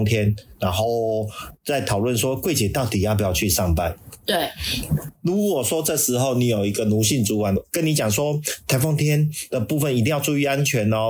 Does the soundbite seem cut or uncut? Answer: uncut